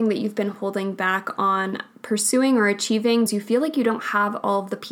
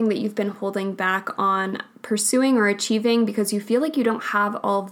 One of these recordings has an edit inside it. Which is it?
first; 1 cut; at 3.3 s

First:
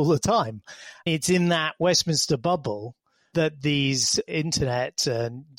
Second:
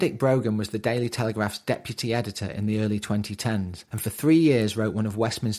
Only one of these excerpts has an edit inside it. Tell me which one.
second; 1 cut; at 3.9 s

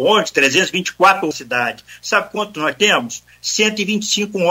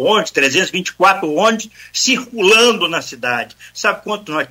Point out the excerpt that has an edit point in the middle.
first; 1 cut; at 1.3 s

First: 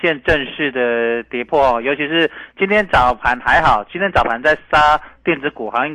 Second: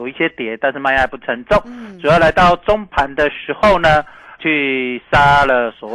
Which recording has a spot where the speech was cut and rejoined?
second; 1 cut; at 4.4 s

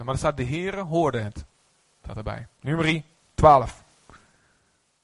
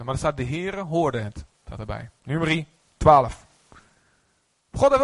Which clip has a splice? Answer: second; 1 cut; at 1.5 s

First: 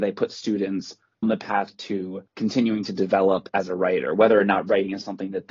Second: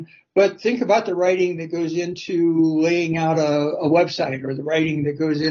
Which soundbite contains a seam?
first; 2 cuts; at 1.2 s, 2.3 s

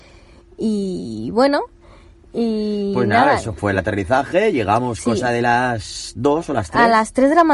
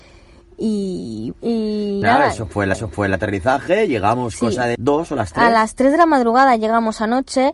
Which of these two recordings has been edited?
second; 4 cuts; at 1.3 s, 2.0 s, 2.7 s, 4.7 s

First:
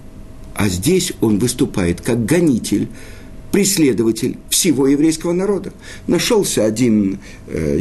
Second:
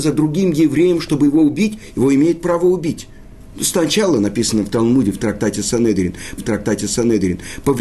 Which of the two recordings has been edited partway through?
second; 1 cut; at 6.4 s

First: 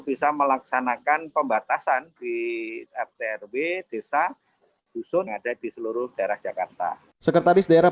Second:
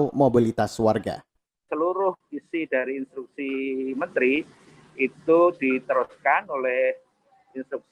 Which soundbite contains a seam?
first; 3 cuts; at 2.9 s, 5.3 s, 6.4 s

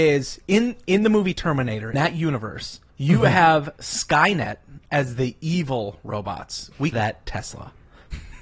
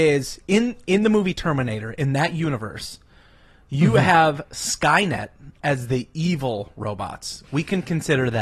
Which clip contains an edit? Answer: first; 3 cuts; at 1.9 s, 2.9 s, 6.9 s

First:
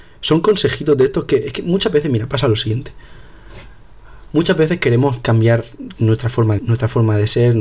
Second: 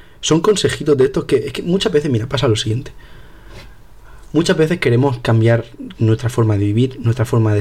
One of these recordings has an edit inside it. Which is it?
first; 1 cut; at 6.6 s

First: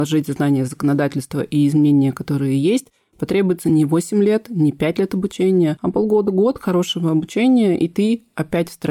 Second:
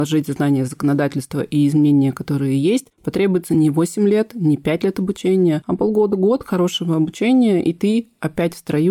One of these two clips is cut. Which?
second; 1 cut; at 2.9 s

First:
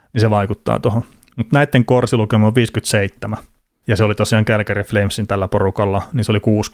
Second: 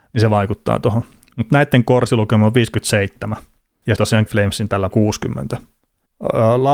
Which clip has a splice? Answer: second; 3 cuts; at 4.0 s, 4.3 s, 4.9 s

